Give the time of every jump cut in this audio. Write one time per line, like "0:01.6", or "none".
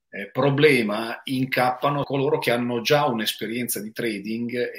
0:02.0